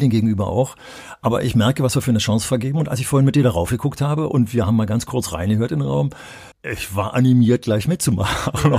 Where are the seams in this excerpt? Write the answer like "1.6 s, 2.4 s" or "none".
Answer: 6.5 s

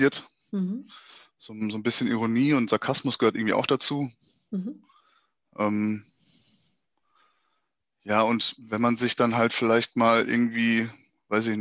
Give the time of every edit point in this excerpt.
none

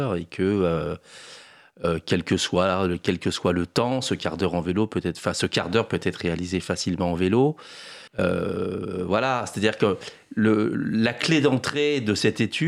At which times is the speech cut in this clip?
8.1 s

